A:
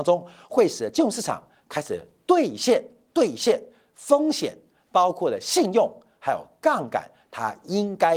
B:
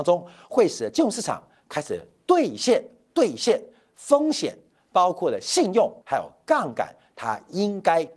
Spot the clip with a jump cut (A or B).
B